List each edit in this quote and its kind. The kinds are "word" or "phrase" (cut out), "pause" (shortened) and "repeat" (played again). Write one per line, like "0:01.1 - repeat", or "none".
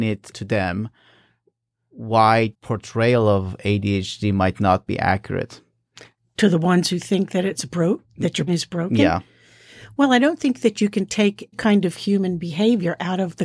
0:02.5 - word
0:08.5 - word
0:11.5 - word